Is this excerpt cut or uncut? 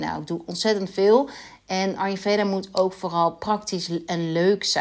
uncut